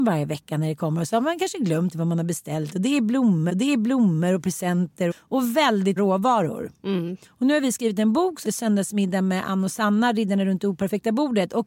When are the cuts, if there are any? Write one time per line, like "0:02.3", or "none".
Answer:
0:01.9
0:03.5
0:05.1
0:06.0
0:07.2
0:08.4